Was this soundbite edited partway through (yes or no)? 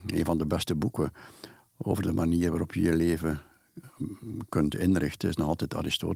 no